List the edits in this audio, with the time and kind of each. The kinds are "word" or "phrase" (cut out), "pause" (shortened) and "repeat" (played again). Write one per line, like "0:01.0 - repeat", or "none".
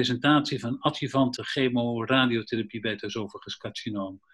0:01.4 - phrase